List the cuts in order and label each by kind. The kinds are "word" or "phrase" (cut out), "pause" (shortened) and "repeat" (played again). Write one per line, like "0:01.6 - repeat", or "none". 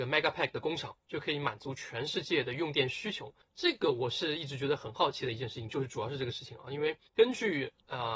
0:01.0 - pause
0:03.4 - pause
0:07.1 - pause